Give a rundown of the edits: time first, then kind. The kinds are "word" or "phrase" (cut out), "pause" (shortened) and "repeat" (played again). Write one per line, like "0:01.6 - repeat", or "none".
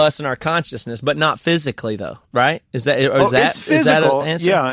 none